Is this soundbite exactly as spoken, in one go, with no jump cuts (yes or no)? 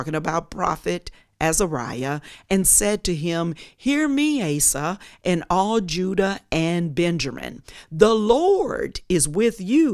yes